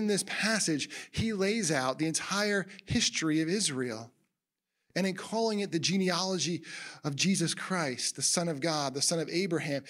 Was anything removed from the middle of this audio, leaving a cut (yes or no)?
no